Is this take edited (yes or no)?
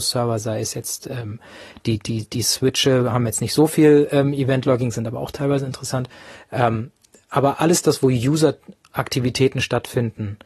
no